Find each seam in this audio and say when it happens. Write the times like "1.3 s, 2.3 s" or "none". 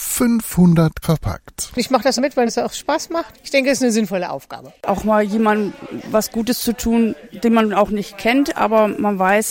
1.0 s, 2.2 s, 2.5 s, 3.3 s